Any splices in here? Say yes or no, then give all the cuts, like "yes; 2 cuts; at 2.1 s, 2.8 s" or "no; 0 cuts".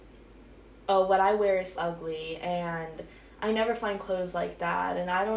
yes; 1 cut; at 1.8 s